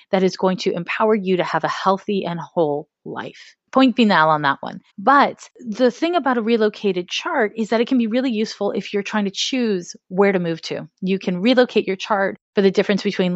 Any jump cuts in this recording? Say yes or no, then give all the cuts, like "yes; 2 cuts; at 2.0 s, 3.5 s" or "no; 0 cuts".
yes; 2 cuts; at 3.6 s, 4.9 s